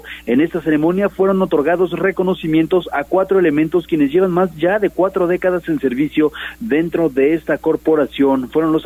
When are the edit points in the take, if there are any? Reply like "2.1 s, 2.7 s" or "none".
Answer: none